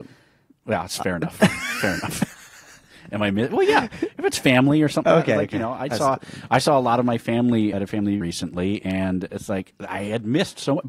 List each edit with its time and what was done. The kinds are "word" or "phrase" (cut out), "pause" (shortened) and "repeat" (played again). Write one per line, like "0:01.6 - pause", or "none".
0:05.0 - word
0:07.7 - word
0:08.2 - word